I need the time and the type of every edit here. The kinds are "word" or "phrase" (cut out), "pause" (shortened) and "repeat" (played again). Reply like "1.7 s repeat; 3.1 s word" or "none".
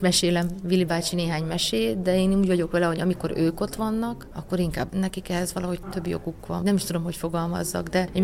4.9 s phrase; 5.8 s word; 6.6 s word